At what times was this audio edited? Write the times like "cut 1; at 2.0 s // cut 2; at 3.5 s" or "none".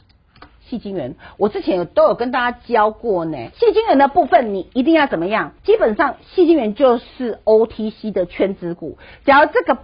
cut 1; at 3.5 s // cut 2; at 5.6 s